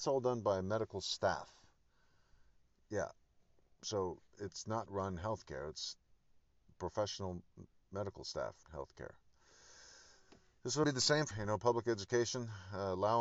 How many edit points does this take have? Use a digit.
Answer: 5